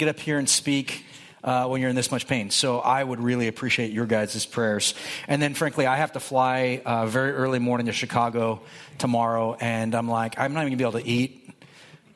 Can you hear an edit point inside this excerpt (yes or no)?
no